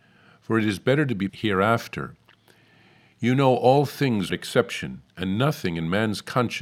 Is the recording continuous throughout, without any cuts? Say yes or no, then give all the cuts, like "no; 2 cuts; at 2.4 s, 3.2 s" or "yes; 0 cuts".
no; 2 cuts; at 1.3 s, 4.3 s